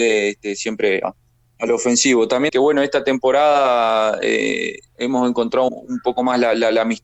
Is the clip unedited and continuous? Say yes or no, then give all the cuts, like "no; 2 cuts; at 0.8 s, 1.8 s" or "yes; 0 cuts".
no; 4 cuts; at 1.0 s, 2.5 s, 4.9 s, 5.7 s